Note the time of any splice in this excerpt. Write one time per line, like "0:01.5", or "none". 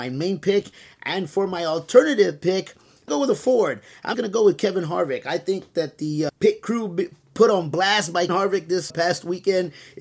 0:03.1
0:04.1
0:08.3
0:08.9

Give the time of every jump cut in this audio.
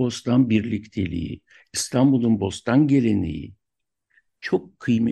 none

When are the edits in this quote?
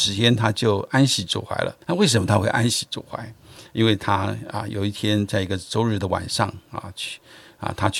0:01.8

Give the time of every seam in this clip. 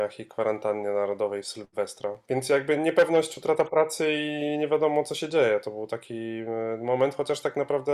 none

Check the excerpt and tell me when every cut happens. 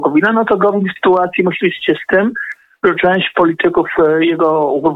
0:01.0

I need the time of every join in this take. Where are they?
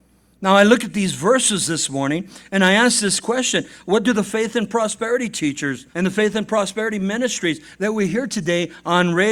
0:05.9

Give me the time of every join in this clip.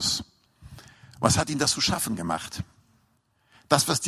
none

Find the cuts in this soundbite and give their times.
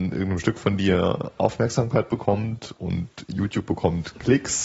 none

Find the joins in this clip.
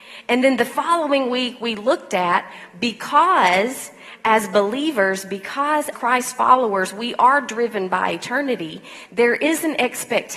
0:05.9

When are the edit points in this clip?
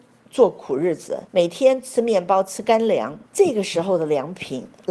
0:01.3
0:03.3

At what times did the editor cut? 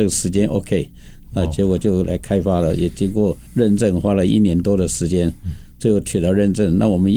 0:01.2
0:03.5

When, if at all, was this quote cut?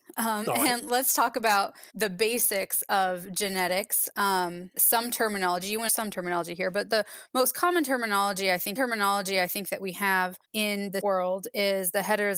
0:01.9
0:04.7
0:05.9
0:08.8
0:10.4
0:11.0

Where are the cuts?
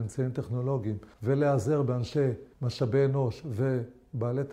0:01.1
0:02.5

